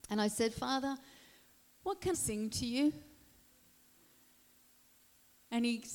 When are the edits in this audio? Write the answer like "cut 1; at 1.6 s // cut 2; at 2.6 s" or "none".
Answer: cut 1; at 2.1 s

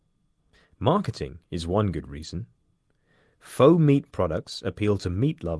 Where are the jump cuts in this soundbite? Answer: none

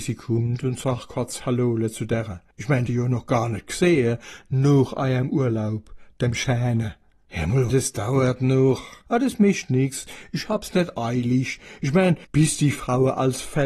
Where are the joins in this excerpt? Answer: cut 1; at 2.5 s // cut 2; at 2.9 s // cut 3; at 7.7 s // cut 4; at 12.2 s

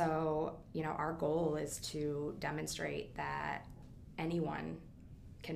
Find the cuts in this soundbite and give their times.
none

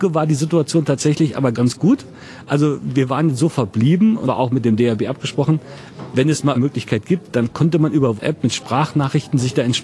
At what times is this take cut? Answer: cut 1; at 4.2 s // cut 2; at 6.5 s // cut 3; at 8.2 s

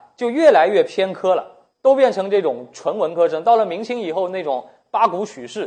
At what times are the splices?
cut 1; at 1.7 s

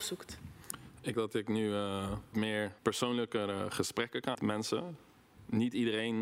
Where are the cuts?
cut 1; at 1.1 s // cut 2; at 2.3 s // cut 3; at 2.8 s // cut 4; at 4.3 s

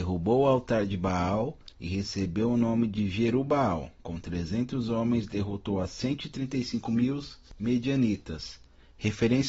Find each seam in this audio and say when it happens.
cut 1; at 1.7 s // cut 2; at 4.0 s

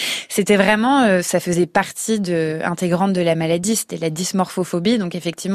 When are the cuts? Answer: none

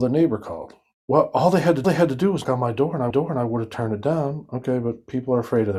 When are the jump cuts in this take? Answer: cut 1; at 1.8 s // cut 2; at 2.4 s // cut 3; at 3.1 s

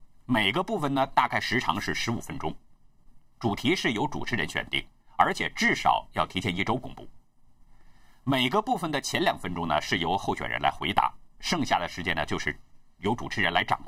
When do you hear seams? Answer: none

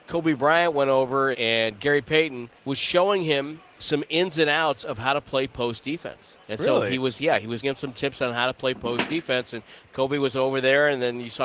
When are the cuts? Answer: cut 1; at 1.3 s // cut 2; at 2.6 s // cut 3; at 3.8 s // cut 4; at 6.4 s // cut 5; at 7.6 s

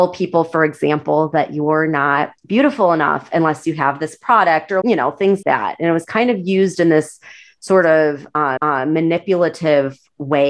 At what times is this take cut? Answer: cut 1; at 2.4 s // cut 2; at 4.8 s // cut 3; at 5.4 s // cut 4; at 8.6 s

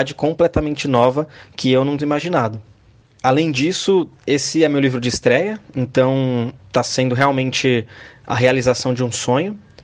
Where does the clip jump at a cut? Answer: cut 1; at 2.0 s // cut 2; at 4.2 s // cut 3; at 6.6 s

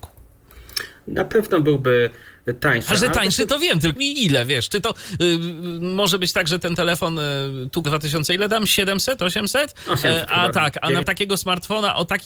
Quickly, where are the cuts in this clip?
cut 1; at 4.0 s // cut 2; at 7.8 s // cut 3; at 10.5 s // cut 4; at 11.0 s

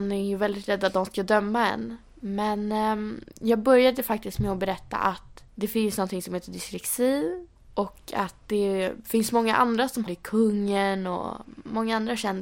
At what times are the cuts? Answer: cut 1; at 5.5 s // cut 2; at 7.6 s // cut 3; at 10.1 s

